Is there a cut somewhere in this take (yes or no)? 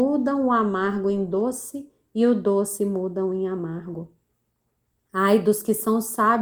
no